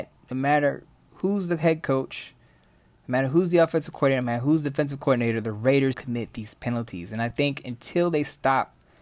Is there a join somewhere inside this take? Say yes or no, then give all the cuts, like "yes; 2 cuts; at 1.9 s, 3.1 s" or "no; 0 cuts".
yes; 1 cut; at 5.9 s